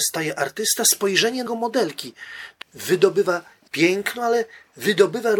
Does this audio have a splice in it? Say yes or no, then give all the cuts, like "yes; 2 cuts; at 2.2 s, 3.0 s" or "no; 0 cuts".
yes; 3 cuts; at 1.5 s, 2.6 s, 3.7 s